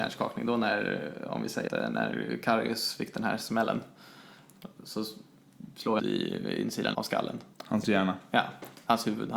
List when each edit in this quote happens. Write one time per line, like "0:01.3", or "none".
0:01.7
0:06.0
0:06.9
0:07.5

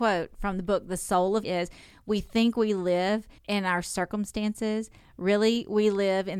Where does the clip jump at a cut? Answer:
0:01.4
0:03.4

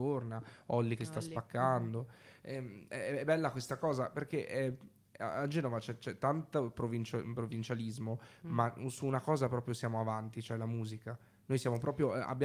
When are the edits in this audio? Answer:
none

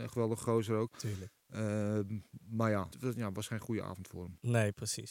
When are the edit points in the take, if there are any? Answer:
0:02.9

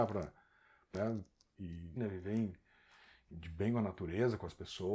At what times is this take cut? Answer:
0:00.9
0:02.0

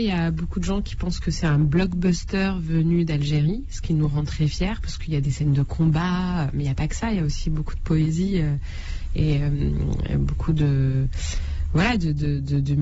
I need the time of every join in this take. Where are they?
none

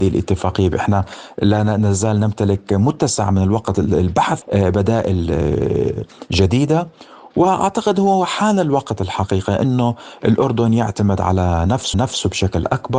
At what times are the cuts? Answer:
0:04.4
0:11.9

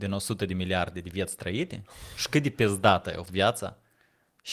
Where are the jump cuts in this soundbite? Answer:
0:03.3

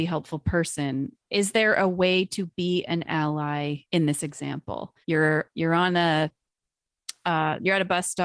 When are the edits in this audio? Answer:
0:03.8
0:05.0

